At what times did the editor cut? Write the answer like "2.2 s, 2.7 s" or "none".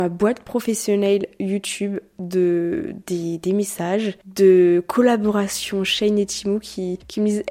none